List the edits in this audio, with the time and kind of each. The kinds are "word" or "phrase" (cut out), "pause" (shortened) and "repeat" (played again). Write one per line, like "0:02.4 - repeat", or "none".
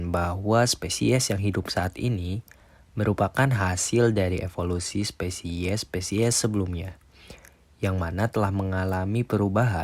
none